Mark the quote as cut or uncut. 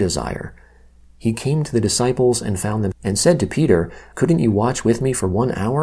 cut